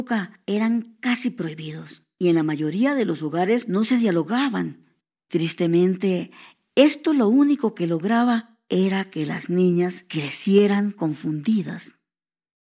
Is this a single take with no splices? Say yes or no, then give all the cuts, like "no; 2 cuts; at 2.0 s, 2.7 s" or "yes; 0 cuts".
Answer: yes; 0 cuts